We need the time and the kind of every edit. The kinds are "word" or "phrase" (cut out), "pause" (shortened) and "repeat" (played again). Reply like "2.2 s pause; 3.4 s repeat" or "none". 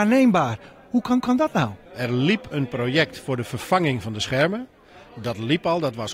1.2 s repeat; 1.9 s pause